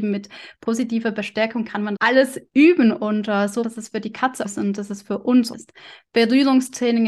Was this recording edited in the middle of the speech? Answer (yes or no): yes